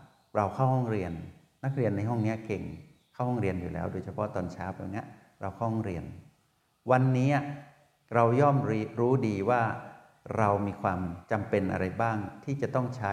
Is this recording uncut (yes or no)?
yes